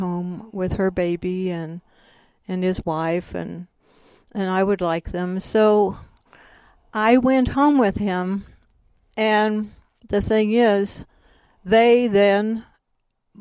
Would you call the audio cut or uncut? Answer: uncut